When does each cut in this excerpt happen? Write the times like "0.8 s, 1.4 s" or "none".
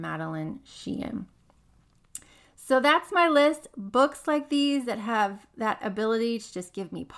none